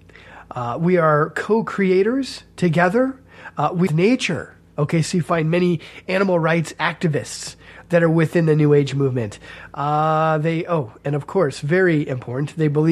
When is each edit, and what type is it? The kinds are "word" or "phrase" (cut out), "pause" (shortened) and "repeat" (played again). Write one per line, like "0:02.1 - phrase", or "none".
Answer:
0:03.9 - phrase

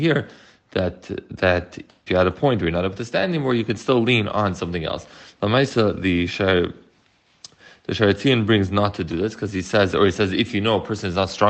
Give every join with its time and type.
0:02.1 - word

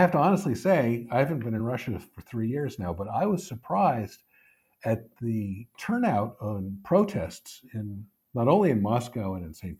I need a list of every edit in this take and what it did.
none

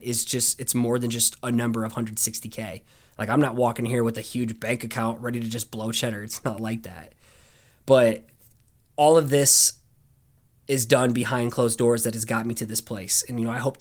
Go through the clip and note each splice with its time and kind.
none

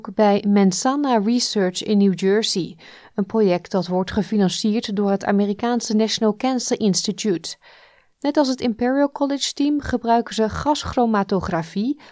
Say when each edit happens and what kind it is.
none

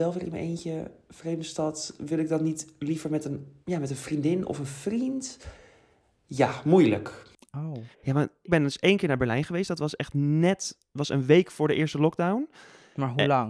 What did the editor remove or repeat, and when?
0:03.6 - pause
0:07.9 - pause
0:08.5 - word

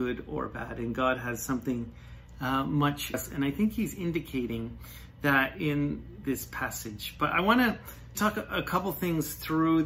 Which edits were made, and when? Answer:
0:03.1 - phrase
0:08.1 - word

